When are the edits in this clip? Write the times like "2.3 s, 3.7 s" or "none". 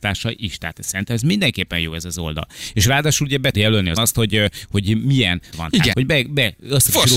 3.5 s, 4.0 s, 5.5 s, 5.9 s